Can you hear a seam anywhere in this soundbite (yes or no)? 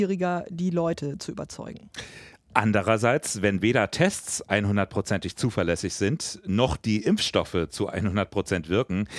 no